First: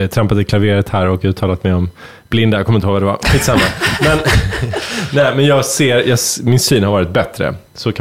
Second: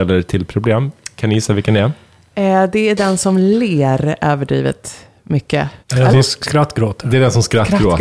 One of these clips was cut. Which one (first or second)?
second